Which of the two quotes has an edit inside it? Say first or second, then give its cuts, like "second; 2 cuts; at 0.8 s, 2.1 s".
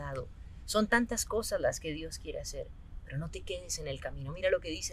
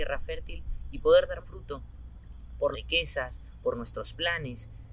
second; 2 cuts; at 1.4 s, 2.7 s